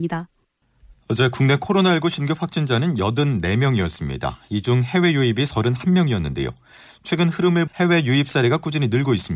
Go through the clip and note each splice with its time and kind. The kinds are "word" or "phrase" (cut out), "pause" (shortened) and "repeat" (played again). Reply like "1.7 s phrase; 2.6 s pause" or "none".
7.7 s word